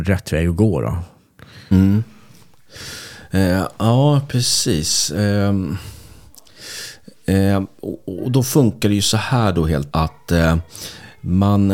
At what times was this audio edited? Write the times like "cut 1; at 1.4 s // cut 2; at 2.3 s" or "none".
cut 1; at 9.9 s